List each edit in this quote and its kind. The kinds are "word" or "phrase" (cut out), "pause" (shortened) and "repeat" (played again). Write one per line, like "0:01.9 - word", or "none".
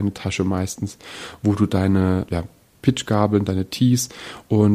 0:02.3 - word